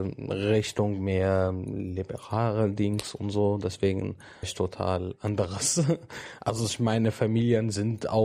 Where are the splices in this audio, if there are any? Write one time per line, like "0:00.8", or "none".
0:04.4